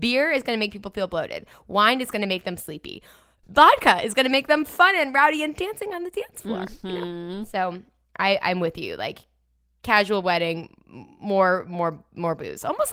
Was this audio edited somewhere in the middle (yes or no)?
no